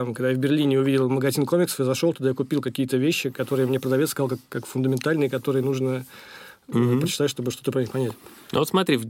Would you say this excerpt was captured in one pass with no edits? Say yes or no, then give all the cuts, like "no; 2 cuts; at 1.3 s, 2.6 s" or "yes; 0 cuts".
yes; 0 cuts